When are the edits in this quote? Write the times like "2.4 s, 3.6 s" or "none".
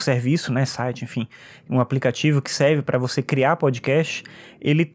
none